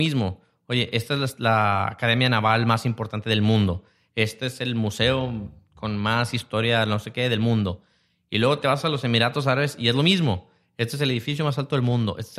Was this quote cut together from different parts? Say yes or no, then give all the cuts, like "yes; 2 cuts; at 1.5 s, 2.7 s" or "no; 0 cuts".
no; 0 cuts